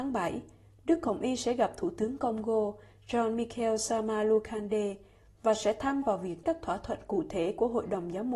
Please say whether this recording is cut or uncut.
cut